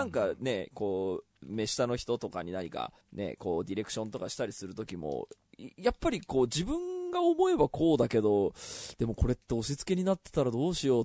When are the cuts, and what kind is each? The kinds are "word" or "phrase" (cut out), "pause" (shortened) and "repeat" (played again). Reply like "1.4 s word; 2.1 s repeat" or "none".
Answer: 3.0 s pause